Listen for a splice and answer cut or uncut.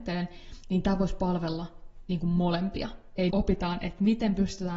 cut